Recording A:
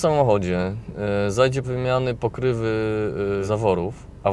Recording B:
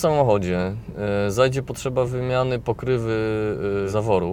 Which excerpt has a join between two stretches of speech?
A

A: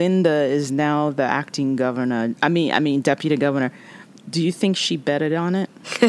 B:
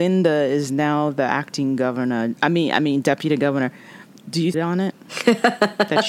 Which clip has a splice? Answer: B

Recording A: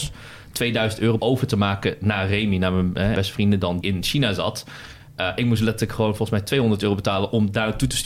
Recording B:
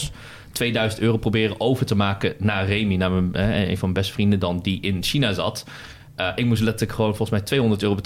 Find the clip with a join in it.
A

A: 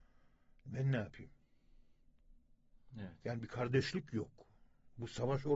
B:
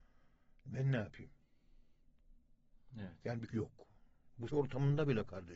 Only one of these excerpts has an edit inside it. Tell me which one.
B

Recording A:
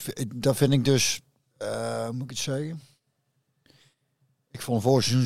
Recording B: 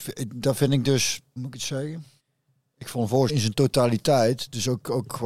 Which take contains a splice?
B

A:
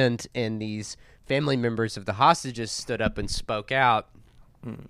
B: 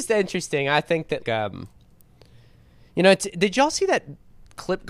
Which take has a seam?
B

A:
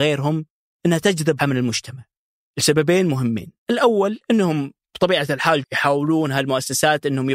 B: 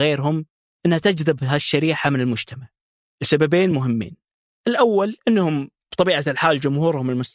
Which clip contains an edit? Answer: A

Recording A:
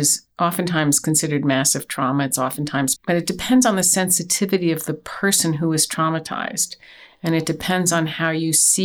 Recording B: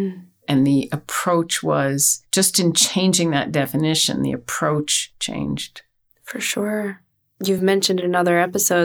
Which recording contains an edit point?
A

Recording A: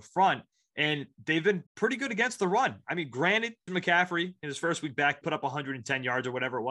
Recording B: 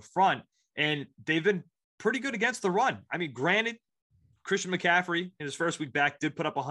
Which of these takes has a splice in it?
A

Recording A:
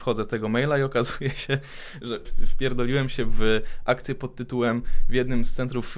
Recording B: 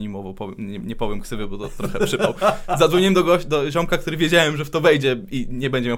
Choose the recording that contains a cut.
A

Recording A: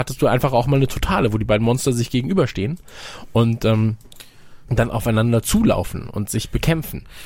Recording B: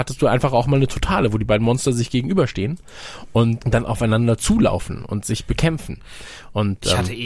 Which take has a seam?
B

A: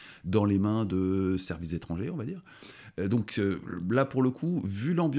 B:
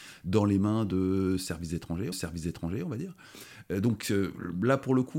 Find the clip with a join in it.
B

